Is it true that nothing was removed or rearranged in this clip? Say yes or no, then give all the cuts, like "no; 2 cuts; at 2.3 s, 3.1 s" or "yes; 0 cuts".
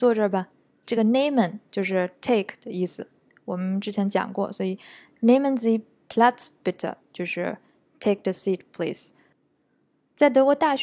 yes; 0 cuts